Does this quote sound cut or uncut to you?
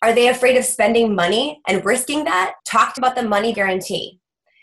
cut